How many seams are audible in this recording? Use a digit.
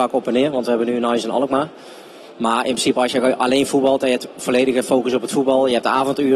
0